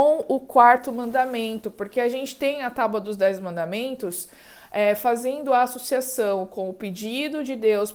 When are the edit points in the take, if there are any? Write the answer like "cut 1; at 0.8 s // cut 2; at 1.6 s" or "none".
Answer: none